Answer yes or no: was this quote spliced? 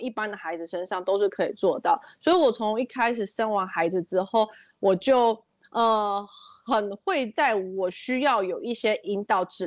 no